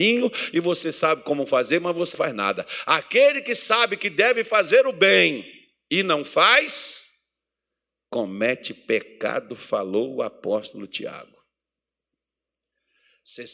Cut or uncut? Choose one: cut